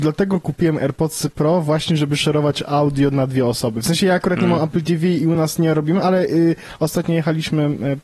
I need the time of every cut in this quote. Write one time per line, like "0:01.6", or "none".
none